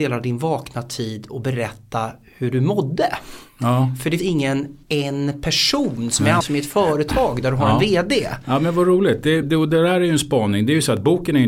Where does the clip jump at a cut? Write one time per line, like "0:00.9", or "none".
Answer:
0:04.2
0:04.8
0:06.4
0:09.4